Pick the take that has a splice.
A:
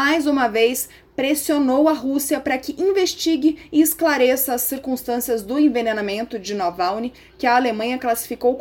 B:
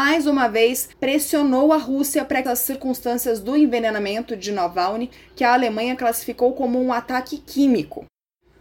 B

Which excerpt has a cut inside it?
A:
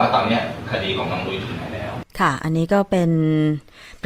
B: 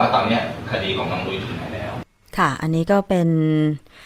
A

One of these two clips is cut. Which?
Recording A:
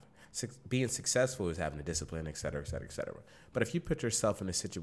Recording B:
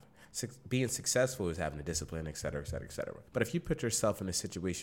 B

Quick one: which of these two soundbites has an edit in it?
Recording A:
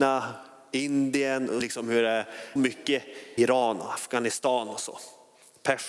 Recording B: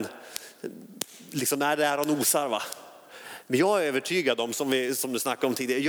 A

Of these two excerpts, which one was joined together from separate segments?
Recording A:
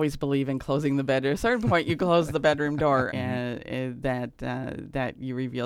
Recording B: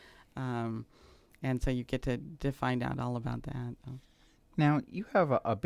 A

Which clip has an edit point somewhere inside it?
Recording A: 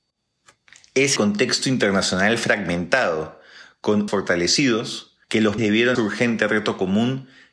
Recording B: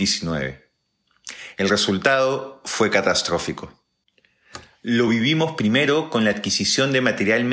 A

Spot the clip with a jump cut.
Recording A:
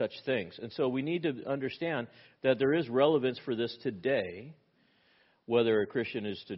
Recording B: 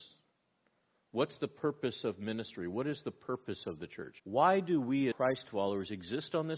B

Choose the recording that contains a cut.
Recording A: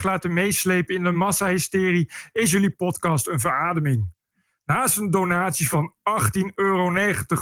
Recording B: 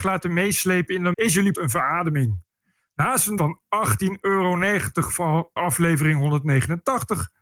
B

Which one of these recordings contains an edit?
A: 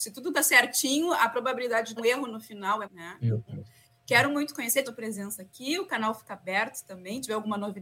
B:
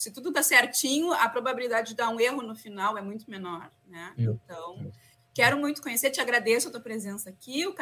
A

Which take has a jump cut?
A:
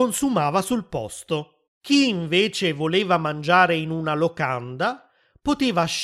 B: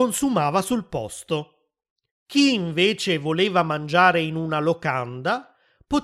A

